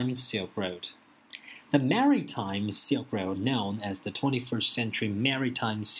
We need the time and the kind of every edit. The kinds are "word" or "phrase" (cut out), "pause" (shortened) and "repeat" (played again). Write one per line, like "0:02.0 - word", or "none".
0:03.3 - word